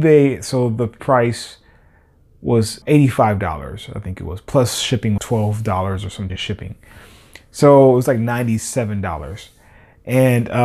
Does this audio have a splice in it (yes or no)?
yes